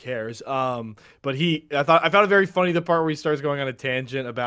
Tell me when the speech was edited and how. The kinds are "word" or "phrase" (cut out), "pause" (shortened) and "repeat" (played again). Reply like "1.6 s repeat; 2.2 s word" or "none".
none